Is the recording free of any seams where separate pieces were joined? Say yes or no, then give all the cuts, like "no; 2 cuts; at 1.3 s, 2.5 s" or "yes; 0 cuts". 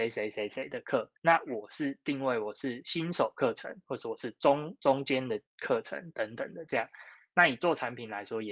no; 2 cuts; at 1.2 s, 5.5 s